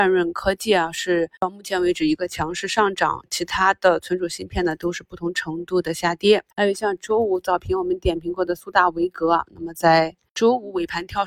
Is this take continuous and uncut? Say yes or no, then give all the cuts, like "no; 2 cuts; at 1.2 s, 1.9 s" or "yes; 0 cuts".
no; 2 cuts; at 1.4 s, 6.5 s